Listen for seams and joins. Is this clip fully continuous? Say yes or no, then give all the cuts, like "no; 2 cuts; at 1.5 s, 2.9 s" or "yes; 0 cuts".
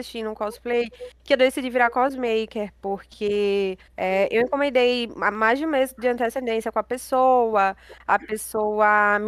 no; 1 cut; at 3.9 s